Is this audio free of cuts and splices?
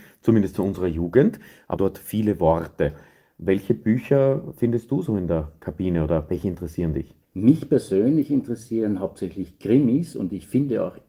no; 2 cuts; at 1.8 s, 7.2 s

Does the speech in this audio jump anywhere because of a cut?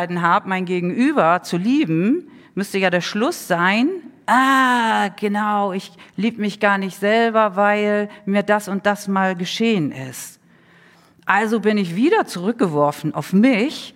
no; 0 cuts

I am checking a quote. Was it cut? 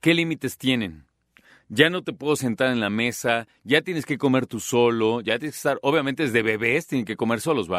no; 0 cuts

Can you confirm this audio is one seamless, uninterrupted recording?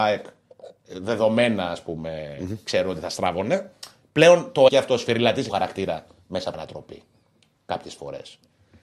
no; 3 cuts; at 4.7 s, 5.5 s, 6.5 s

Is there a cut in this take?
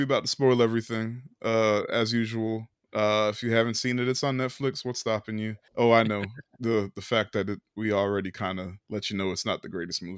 no; 0 cuts

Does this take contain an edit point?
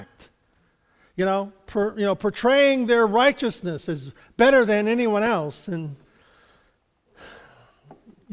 no; 0 cuts

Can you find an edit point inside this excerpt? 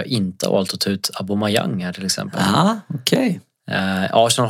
no; 0 cuts

